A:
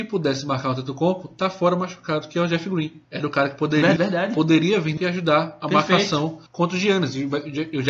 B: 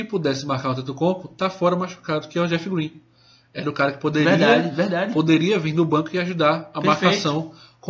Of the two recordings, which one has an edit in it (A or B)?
A